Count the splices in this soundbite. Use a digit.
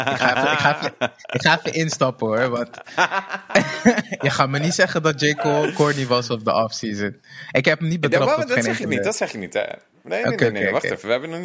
0